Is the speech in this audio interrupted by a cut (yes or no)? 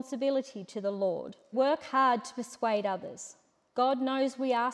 yes